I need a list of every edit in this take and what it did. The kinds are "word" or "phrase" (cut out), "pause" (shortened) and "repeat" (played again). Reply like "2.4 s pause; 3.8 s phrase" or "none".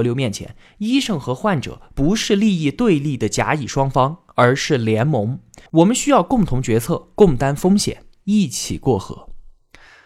5.7 s pause